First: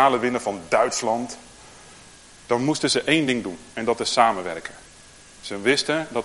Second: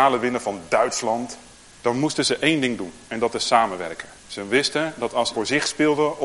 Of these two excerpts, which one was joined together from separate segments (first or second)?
second